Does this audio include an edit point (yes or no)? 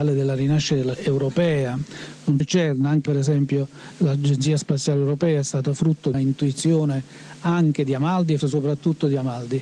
yes